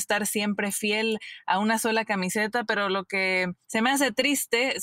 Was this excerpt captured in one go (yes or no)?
no